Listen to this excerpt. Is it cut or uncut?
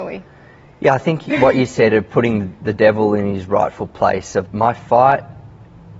cut